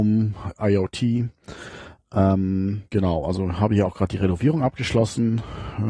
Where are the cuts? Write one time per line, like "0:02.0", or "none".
0:02.9